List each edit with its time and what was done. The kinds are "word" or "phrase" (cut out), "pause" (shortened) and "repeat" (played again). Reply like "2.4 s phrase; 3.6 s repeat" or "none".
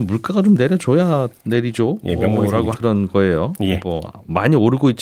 2.7 s word